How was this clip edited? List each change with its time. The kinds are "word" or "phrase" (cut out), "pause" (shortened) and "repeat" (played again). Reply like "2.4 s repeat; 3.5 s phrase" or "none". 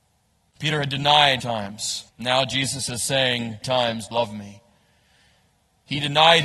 1.4 s phrase; 2.1 s pause; 3.6 s word; 4.1 s word